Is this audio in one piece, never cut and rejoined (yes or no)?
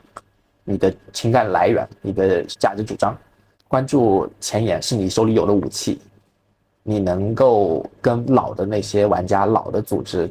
yes